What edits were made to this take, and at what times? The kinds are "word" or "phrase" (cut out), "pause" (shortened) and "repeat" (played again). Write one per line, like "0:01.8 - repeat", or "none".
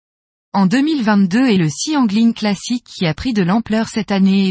0:01.6 - word